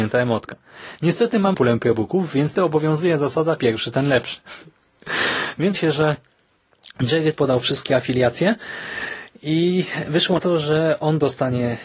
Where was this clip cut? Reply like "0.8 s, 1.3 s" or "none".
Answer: 1.5 s, 2.5 s, 3.6 s, 5.7 s, 7.3 s, 10.4 s